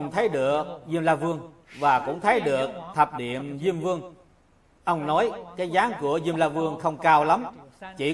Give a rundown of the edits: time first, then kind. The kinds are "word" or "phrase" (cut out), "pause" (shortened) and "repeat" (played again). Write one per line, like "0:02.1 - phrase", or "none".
none